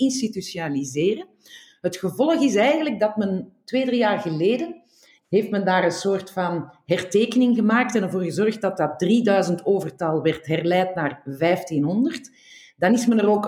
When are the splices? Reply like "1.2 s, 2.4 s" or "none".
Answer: none